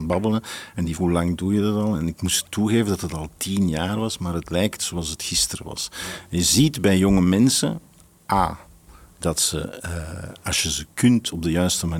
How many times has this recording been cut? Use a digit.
1